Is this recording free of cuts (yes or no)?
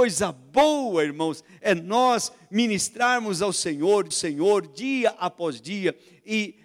no